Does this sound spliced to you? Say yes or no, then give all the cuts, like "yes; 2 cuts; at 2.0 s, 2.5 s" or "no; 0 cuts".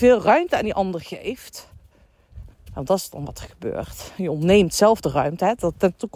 yes; 1 cut; at 2.5 s